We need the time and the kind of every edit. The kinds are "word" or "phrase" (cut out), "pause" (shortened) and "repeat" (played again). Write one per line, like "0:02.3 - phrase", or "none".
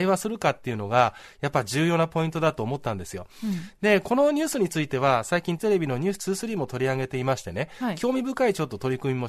0:05.6 - word